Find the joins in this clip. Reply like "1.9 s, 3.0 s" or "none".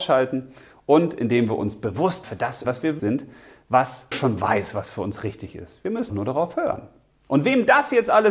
2.2 s, 2.6 s, 3.0 s, 4.1 s, 6.1 s

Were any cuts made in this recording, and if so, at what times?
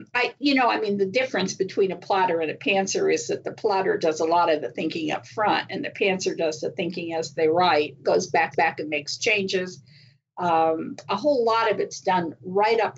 8.5 s, 11.1 s

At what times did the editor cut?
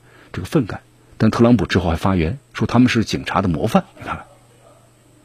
3.9 s

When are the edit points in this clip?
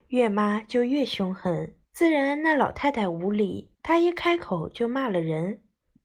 1.8 s, 3.7 s

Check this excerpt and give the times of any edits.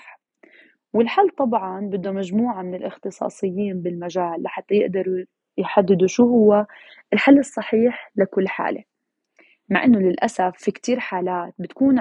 none

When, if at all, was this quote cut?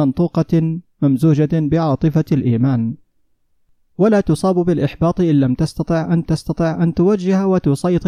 6.2 s

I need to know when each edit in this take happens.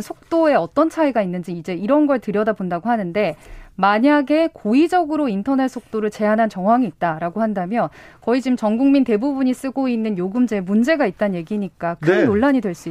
none

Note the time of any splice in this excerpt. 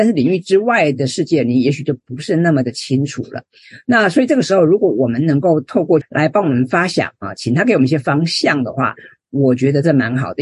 6.0 s

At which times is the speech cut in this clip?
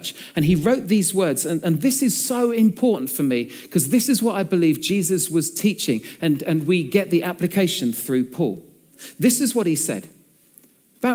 none

